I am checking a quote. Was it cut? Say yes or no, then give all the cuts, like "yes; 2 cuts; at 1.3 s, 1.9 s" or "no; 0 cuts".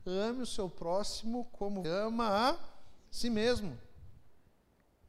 yes; 2 cuts; at 1.8 s, 3.1 s